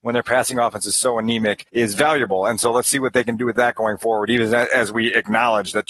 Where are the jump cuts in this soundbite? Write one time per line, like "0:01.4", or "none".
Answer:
0:01.7

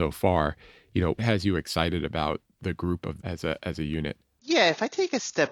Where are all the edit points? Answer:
0:01.2
0:02.6
0:03.2

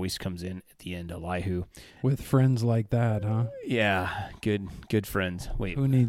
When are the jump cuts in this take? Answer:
0:01.9

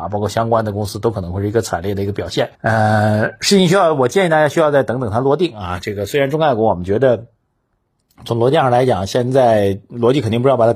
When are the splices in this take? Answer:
0:02.5

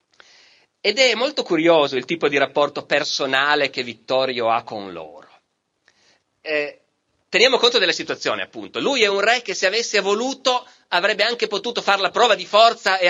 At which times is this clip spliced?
none

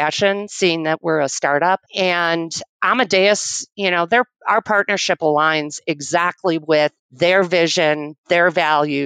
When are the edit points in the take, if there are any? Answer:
0:01.9
0:07.0

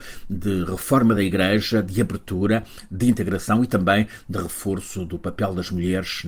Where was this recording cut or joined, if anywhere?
none

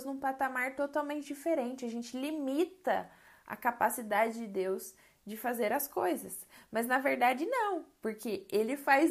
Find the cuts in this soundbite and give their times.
none

